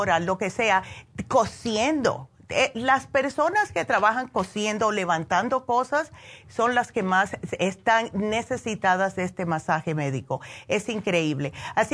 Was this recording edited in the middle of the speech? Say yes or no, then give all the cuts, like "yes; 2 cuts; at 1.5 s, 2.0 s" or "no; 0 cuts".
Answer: no; 0 cuts